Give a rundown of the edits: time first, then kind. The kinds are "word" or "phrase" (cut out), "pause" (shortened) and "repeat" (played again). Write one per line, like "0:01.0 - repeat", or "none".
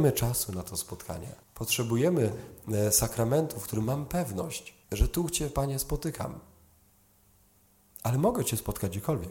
0:01.4 - pause
0:04.8 - pause